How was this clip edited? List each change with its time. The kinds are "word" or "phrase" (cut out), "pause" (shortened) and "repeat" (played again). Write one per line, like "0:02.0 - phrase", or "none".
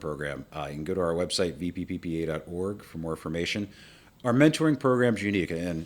none

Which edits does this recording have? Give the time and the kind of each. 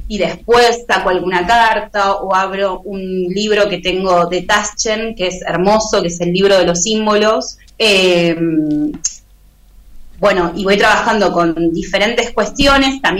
0:07.7 - pause

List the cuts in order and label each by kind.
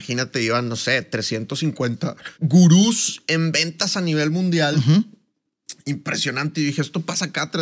0:02.3 - pause

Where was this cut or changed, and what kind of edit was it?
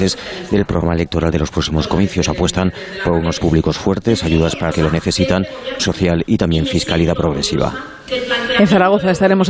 0:03.4 - word
0:04.7 - word
0:05.8 - word

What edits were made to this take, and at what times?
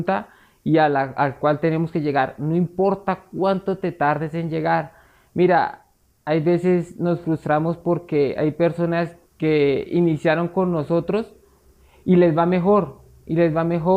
0:09.3 - pause

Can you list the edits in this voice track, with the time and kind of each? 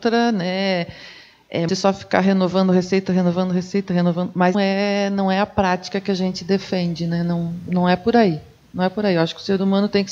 0:01.7 - phrase
0:04.5 - word

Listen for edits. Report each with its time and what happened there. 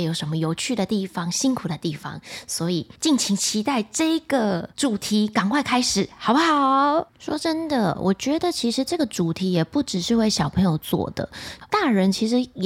0:03.0 - pause
0:11.7 - word

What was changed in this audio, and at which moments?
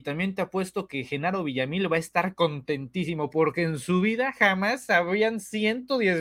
none

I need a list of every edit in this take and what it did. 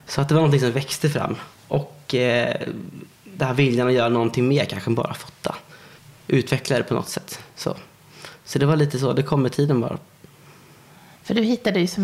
0:01.5 - pause
0:06.0 - pause

